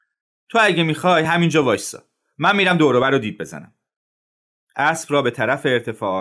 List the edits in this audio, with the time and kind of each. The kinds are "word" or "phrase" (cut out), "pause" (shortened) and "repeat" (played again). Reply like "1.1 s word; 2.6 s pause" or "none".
none